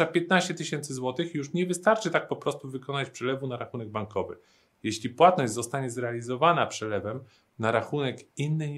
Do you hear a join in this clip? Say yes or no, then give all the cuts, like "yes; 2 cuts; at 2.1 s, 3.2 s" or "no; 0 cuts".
no; 0 cuts